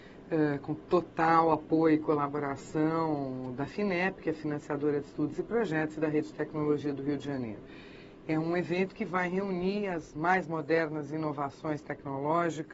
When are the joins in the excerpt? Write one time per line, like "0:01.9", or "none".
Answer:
none